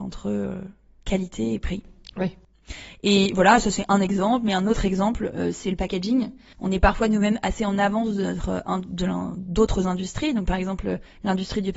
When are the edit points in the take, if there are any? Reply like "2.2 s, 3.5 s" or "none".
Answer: none